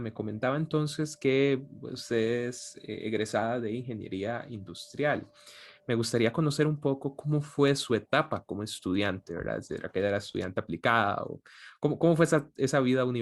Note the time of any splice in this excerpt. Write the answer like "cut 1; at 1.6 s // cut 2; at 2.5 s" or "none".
none